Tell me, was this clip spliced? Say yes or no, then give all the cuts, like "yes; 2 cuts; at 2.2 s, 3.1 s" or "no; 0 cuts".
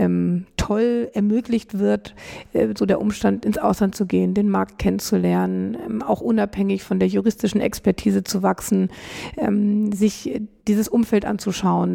no; 0 cuts